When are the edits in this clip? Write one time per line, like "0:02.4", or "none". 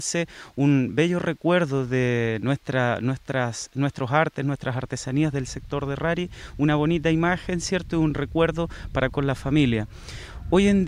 0:09.1